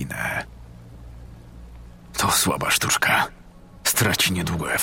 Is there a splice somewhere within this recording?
no; 0 cuts

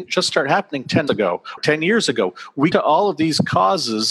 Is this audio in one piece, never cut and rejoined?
no; 3 cuts; at 1.1 s, 1.6 s, 2.7 s

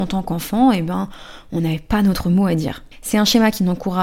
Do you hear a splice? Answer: yes; 1 cut; at 2.9 s

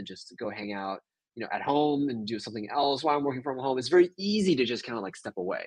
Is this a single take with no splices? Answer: yes; 0 cuts

